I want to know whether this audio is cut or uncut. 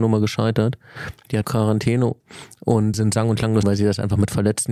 cut